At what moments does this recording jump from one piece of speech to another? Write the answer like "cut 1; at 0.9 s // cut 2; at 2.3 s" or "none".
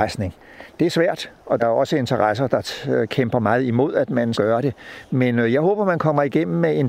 cut 1; at 1.6 s // cut 2; at 4.3 s